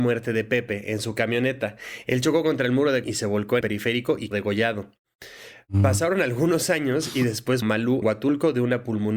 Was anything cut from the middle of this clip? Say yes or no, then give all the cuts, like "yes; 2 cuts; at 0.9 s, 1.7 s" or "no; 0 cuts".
yes; 5 cuts; at 3.0 s, 3.6 s, 4.3 s, 7.6 s, 8.0 s